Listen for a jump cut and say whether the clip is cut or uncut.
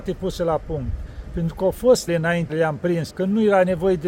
cut